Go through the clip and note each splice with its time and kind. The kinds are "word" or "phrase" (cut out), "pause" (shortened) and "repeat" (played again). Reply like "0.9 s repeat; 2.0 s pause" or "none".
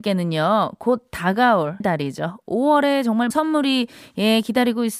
1.8 s word; 3.3 s word